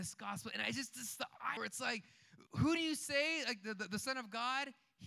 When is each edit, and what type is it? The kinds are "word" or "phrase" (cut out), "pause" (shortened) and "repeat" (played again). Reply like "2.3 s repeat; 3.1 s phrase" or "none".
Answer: 1.6 s phrase; 2.5 s pause